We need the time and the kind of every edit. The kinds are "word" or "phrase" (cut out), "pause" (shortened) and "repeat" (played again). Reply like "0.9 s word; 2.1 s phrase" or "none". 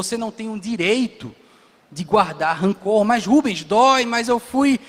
none